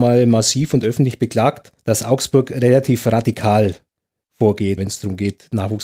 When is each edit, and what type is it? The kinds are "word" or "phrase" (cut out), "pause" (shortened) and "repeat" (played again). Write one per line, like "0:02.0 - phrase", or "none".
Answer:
0:01.8 - pause
0:04.8 - word